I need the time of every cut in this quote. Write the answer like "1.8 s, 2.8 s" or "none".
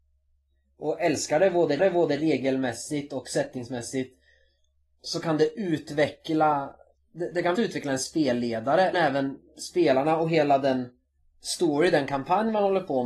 1.8 s, 7.0 s, 7.6 s, 8.9 s